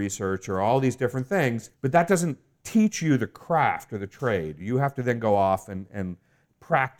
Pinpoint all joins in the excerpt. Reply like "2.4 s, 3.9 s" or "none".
1.7 s